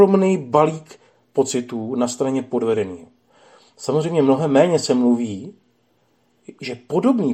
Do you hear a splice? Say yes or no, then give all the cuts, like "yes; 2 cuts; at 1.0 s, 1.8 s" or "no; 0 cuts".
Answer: no; 0 cuts